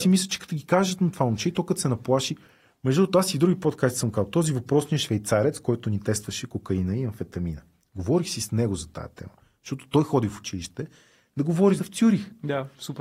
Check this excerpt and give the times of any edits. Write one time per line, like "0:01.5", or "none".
0:11.8